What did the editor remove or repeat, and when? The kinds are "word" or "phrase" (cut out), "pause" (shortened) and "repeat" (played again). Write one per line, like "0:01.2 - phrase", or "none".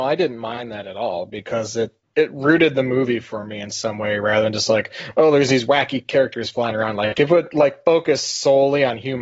none